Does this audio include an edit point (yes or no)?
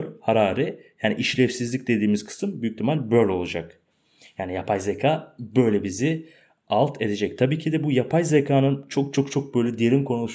no